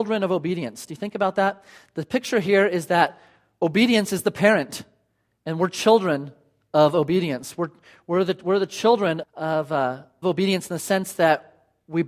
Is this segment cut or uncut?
cut